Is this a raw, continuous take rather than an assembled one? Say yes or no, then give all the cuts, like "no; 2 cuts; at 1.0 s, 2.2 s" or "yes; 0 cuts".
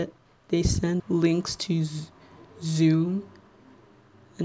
no; 1 cut; at 1.0 s